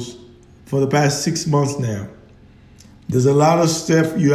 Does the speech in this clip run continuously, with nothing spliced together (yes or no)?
yes